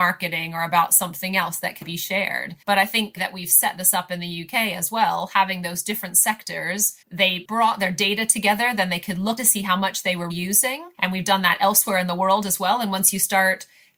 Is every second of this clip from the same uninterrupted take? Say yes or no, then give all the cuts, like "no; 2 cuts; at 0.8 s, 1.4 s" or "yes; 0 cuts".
no; 7 cuts; at 1.8 s, 2.6 s, 3.2 s, 7.0 s, 9.4 s, 10.3 s, 10.9 s